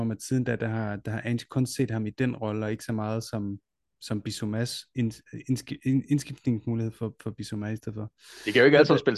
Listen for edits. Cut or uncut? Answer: uncut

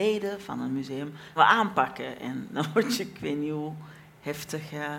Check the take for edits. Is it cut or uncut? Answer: cut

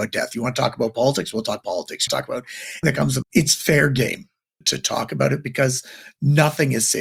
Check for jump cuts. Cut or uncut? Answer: cut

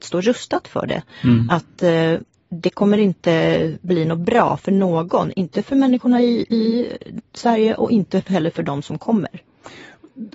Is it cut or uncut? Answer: uncut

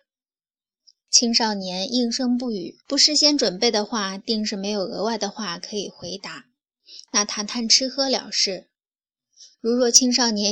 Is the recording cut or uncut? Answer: cut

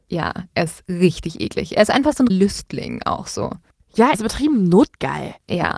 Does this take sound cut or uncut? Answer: cut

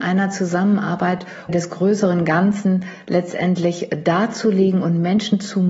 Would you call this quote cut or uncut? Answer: cut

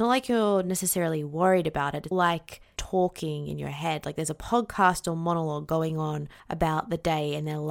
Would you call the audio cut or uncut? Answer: cut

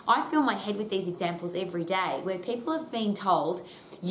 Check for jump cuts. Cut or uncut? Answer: uncut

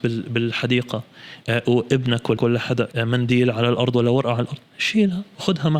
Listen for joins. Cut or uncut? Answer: cut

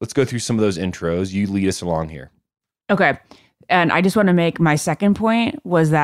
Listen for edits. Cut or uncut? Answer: uncut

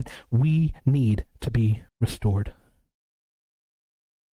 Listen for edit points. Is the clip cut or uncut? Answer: cut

